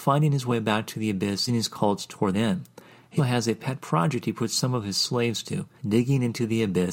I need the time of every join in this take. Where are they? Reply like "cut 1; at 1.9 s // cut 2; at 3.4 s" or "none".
cut 1; at 1.5 s // cut 2; at 2.3 s // cut 3; at 3.2 s // cut 4; at 5.8 s